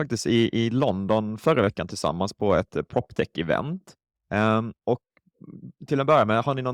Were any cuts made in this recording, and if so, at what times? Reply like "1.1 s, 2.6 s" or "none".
4.8 s